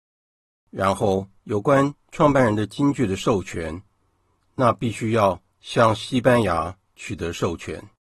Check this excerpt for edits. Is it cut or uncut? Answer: cut